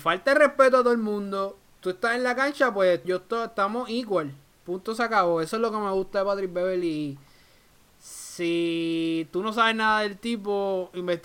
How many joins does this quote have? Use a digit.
1